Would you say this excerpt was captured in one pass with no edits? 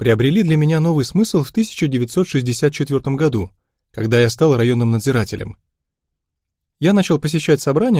yes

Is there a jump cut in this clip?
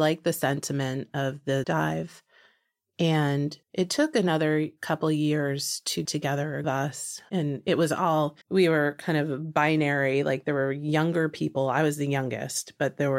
yes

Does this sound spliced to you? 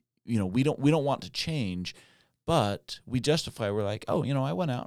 no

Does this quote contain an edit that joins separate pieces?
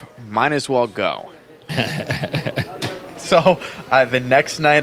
no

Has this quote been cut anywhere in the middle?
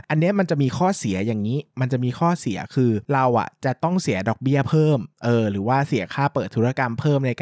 yes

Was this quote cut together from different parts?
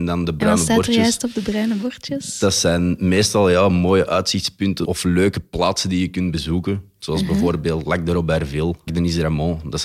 yes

